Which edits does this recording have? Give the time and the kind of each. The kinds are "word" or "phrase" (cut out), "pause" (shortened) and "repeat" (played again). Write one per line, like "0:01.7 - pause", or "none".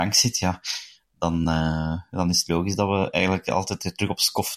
none